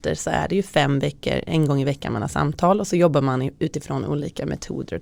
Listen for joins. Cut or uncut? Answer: uncut